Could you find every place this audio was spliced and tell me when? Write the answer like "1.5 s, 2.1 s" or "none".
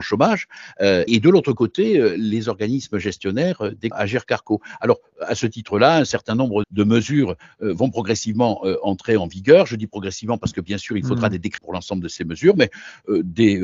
1.1 s, 3.9 s, 6.6 s, 11.6 s